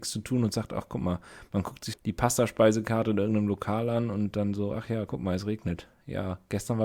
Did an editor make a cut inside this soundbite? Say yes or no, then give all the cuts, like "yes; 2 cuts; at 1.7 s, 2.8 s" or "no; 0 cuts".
yes; 1 cut; at 1.9 s